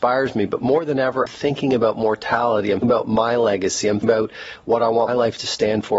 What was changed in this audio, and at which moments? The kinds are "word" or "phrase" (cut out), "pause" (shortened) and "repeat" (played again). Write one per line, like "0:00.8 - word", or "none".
0:01.3 - word
0:02.8 - word
0:04.0 - word
0:05.1 - word